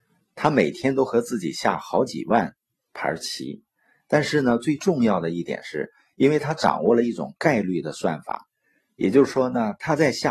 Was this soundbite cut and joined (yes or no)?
no